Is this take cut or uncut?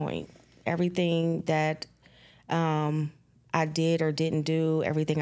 uncut